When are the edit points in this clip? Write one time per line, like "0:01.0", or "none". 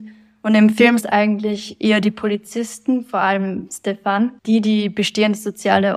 0:01.0
0:04.4